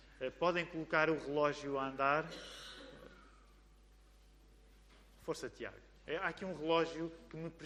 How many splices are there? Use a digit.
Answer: 0